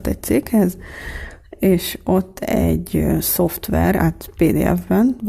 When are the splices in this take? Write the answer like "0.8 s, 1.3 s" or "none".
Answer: none